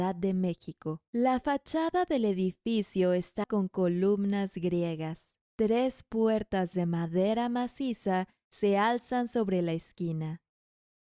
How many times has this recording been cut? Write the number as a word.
four